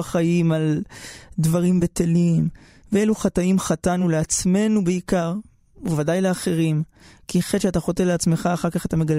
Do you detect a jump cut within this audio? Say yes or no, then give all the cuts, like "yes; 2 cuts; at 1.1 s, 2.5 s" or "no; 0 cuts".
no; 0 cuts